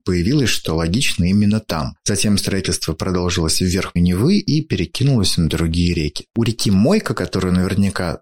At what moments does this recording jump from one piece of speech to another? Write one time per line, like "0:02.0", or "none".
0:04.0